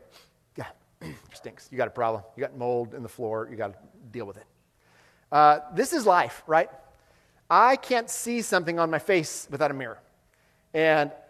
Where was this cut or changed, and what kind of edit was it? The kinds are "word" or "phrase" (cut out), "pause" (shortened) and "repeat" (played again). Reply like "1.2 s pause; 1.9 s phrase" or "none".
1.3 s word